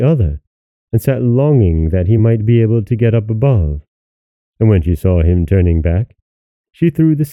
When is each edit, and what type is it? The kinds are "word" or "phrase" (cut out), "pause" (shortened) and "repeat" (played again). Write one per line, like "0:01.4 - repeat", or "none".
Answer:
none